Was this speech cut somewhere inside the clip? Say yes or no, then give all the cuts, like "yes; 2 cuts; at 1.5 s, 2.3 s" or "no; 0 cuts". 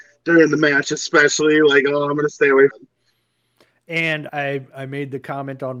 yes; 2 cuts; at 2.7 s, 4.3 s